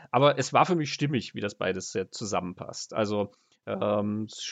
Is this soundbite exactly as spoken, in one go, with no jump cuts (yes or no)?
yes